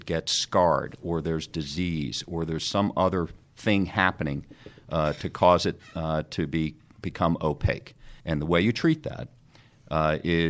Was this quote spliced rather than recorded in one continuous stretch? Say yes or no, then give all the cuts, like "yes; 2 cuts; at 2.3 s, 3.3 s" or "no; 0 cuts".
yes; 1 cut; at 8.2 s